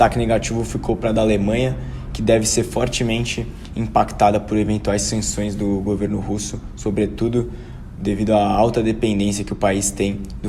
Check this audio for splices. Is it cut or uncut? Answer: uncut